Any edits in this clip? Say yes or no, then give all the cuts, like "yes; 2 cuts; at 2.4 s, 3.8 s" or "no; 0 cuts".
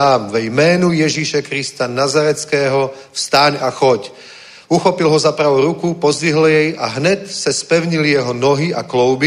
no; 0 cuts